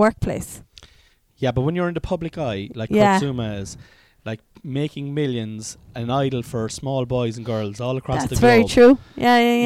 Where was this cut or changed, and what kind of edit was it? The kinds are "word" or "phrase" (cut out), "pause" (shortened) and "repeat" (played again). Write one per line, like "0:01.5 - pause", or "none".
none